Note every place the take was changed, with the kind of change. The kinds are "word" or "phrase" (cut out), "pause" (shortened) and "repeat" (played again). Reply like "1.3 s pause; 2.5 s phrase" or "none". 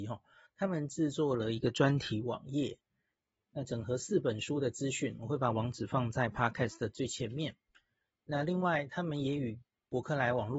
none